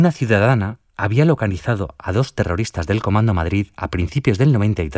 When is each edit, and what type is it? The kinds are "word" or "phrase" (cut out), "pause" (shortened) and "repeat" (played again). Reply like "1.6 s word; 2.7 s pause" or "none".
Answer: none